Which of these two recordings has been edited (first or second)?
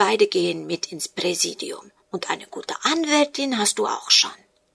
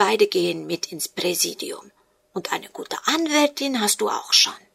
first